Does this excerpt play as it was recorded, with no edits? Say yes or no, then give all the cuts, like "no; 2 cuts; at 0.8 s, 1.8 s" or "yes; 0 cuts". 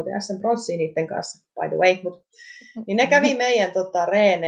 yes; 0 cuts